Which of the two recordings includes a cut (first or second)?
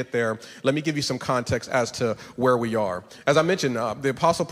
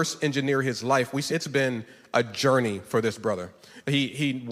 second